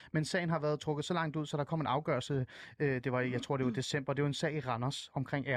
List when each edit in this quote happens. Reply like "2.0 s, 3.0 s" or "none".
none